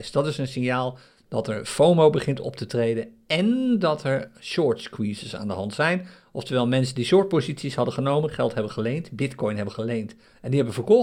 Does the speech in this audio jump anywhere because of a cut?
no; 0 cuts

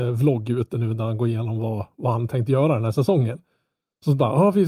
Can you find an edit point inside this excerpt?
no; 0 cuts

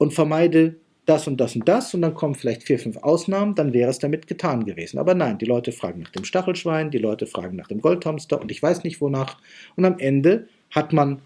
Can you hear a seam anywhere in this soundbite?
no; 0 cuts

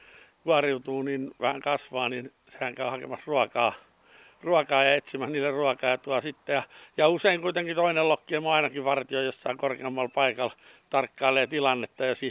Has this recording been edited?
no; 0 cuts

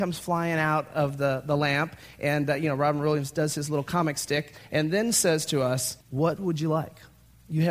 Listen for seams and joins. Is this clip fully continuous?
no; 1 cut; at 6.0 s

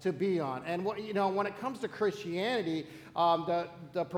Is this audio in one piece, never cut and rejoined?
yes; 0 cuts

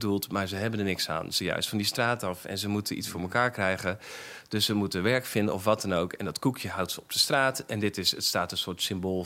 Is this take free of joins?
no; 1 cut; at 1.4 s

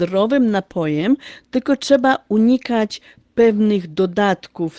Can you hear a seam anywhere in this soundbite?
no; 0 cuts

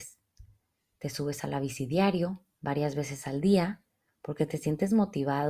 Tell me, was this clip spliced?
no; 0 cuts

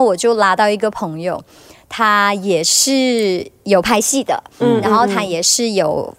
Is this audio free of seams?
yes; 0 cuts

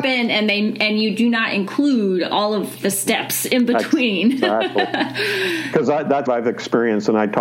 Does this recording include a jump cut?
yes; 1 cut; at 6.3 s

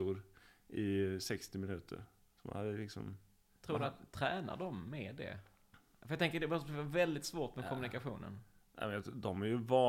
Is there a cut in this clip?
no; 0 cuts

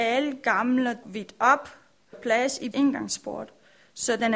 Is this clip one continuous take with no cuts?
no; 3 cuts; at 1.0 s, 2.1 s, 2.7 s

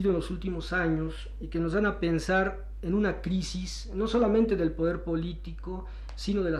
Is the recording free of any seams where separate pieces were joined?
yes; 0 cuts

